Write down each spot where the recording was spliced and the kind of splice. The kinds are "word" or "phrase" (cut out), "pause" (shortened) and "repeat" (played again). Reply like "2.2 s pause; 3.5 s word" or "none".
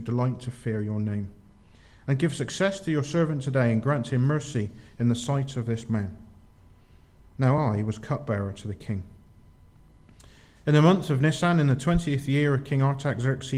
none